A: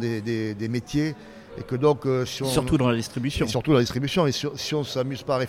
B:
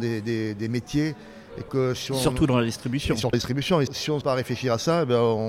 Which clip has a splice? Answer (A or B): B